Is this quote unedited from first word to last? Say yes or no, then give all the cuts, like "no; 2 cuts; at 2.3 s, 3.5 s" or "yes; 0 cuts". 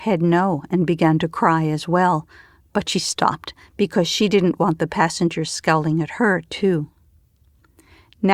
yes; 0 cuts